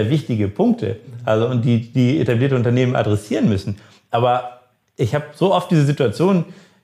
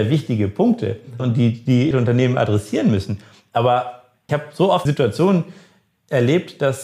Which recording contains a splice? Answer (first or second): second